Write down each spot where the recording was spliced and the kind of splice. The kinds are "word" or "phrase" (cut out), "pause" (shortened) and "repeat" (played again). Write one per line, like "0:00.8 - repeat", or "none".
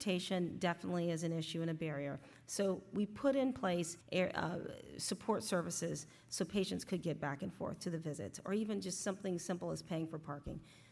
0:04.0 - pause